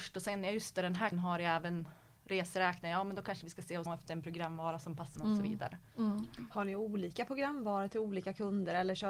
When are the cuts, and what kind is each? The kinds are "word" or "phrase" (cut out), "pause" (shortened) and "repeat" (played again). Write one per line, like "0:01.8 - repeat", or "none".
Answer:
0:01.1 - word
0:02.2 - pause
0:03.9 - word
0:05.2 - word